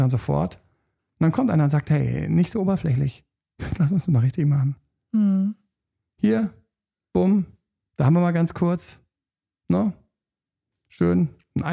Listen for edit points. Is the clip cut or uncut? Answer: uncut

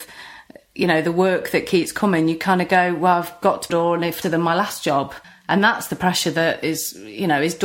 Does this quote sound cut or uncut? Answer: cut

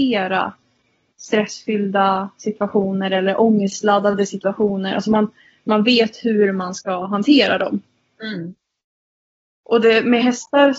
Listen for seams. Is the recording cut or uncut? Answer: uncut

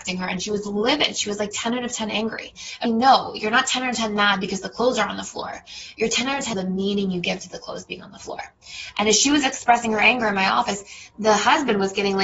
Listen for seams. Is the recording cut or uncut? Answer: cut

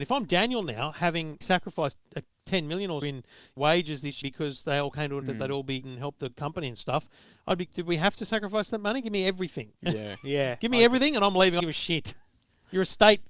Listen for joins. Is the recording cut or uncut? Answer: cut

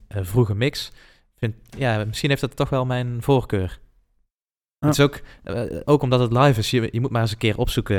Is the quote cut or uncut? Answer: uncut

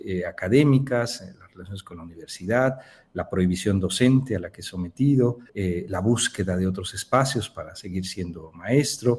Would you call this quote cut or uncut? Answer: cut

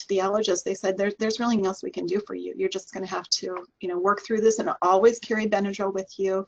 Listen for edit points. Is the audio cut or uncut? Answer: cut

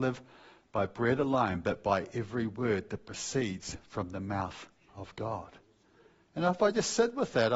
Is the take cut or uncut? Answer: uncut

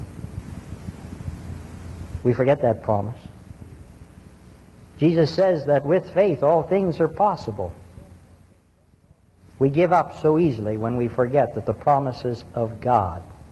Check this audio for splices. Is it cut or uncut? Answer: uncut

